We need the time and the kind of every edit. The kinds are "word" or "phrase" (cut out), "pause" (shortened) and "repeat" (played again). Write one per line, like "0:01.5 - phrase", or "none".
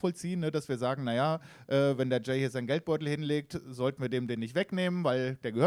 none